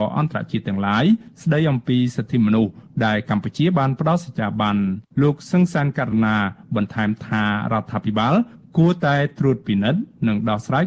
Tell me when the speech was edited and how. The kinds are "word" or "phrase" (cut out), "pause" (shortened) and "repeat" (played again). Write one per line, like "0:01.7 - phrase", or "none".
0:05.1 - pause